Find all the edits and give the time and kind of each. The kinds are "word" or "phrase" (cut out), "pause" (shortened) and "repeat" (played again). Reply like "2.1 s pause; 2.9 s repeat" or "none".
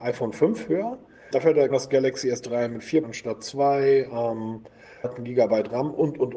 1.3 s word; 1.7 s word; 3.0 s word; 5.0 s word